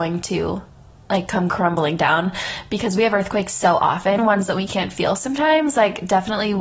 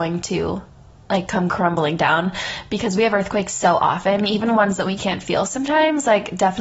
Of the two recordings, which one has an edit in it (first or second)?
first